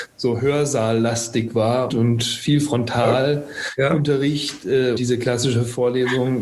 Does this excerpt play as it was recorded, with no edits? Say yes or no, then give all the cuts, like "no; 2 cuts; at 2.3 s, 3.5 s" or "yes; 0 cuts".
no; 2 cuts; at 1.9 s, 5.0 s